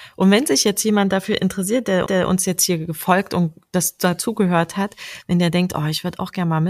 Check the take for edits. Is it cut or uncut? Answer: cut